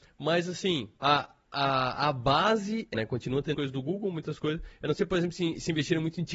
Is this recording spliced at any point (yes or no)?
yes